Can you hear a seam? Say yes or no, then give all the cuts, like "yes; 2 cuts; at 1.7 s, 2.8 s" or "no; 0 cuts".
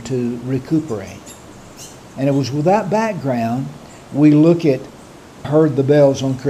yes; 1 cut; at 5.4 s